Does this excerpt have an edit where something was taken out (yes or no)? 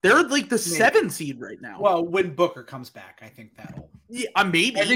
no